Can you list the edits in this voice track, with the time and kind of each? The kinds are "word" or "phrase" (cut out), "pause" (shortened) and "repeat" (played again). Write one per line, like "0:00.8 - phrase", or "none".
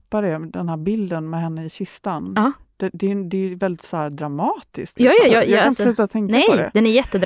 0:05.3 - word